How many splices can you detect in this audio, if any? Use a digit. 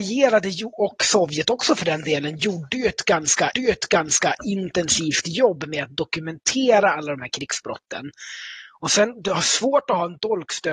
1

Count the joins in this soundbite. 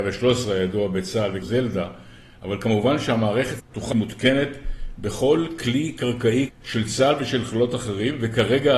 4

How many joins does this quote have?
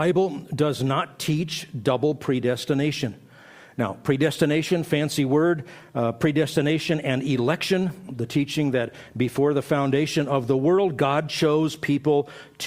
0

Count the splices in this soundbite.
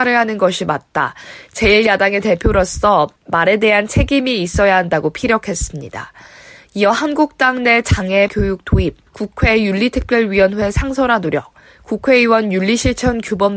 3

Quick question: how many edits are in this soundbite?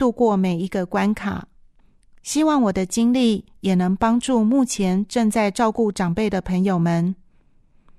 1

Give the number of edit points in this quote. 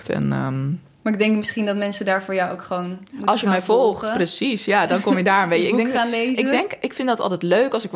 0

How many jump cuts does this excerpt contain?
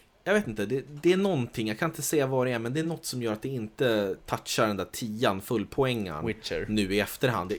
0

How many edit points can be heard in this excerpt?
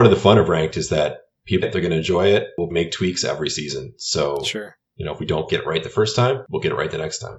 3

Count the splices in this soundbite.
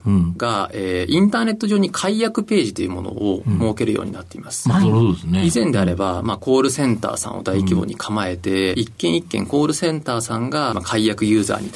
2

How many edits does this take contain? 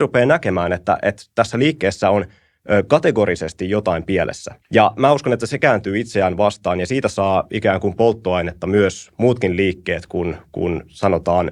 1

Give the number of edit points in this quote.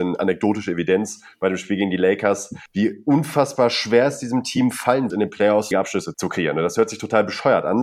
2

